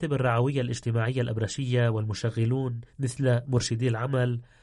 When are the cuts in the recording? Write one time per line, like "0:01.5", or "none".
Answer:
0:02.9